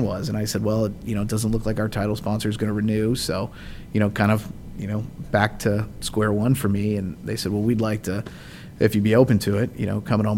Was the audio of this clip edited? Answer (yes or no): no